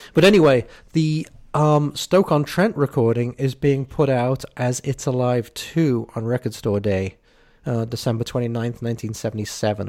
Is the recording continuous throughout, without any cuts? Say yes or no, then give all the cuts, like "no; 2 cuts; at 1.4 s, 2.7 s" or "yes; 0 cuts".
yes; 0 cuts